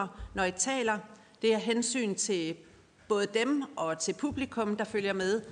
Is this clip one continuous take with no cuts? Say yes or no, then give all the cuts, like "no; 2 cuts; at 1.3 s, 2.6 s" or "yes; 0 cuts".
yes; 0 cuts